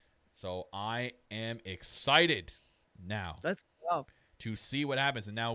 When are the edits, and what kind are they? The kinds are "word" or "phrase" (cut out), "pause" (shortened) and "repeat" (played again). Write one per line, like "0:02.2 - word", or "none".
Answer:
none